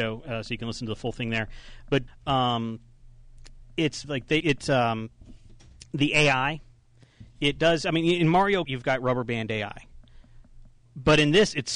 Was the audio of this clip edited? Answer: yes; 4 cuts; at 2.1 s, 4.0 s, 4.4 s, 8.7 s

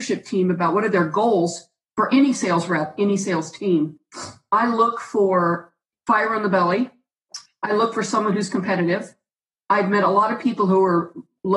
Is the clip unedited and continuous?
yes; 0 cuts

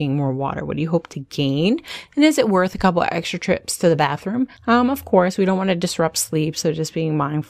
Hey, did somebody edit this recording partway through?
yes; 1 cut; at 4.6 s

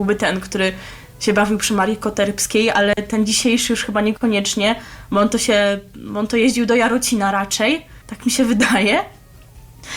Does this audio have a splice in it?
yes; 1 cut; at 8.0 s

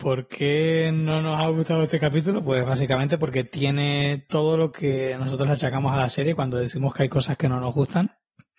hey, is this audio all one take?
yes; 0 cuts

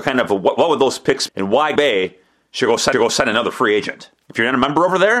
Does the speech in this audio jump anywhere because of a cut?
yes; 4 cuts; at 1.3 s, 1.8 s, 2.9 s, 4.2 s

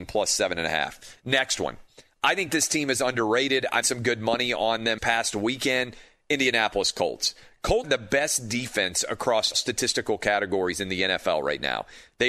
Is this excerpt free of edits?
no; 4 cuts; at 3.8 s, 5.0 s, 7.8 s, 9.5 s

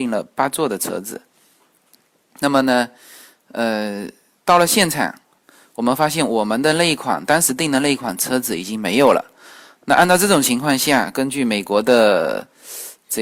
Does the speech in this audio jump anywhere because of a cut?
no; 0 cuts

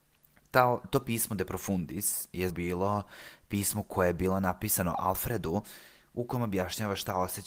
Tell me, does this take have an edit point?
yes; 1 cut; at 2.5 s

